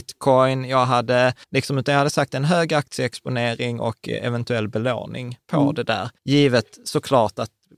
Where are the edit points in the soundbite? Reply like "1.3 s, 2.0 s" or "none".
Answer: 1.4 s, 6.2 s